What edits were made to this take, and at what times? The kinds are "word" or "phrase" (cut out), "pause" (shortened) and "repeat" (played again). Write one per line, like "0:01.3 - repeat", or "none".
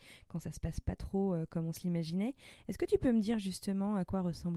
none

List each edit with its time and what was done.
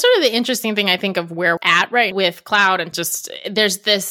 0:01.6 - word
0:02.1 - word
0:02.9 - phrase

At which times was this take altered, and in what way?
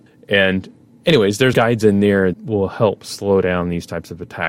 0:01.5 - word
0:02.3 - word

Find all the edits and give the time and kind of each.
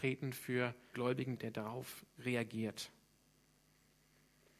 0:00.9 - word
0:01.4 - word

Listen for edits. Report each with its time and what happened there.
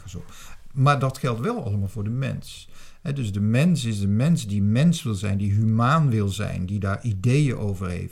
none

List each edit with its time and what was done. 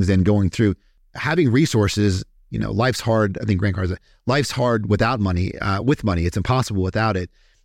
none

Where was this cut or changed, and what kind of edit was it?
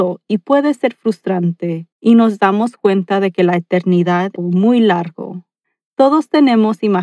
0:01.9 - pause
0:04.4 - phrase
0:05.6 - pause

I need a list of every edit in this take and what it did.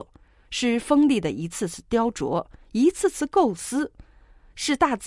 none

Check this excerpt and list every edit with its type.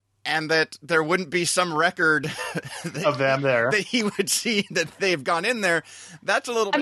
none

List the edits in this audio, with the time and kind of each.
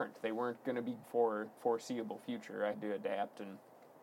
0:01.0 - word
0:01.6 - word
0:02.7 - word

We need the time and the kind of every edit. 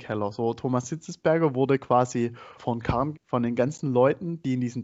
0:02.6 - word
0:03.1 - word

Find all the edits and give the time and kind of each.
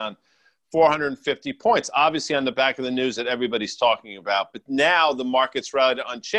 none

